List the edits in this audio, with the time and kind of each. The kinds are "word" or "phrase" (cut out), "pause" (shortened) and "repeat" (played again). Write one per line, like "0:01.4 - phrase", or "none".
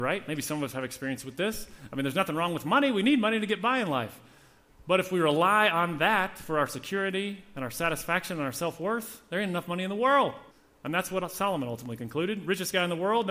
0:10.5 - pause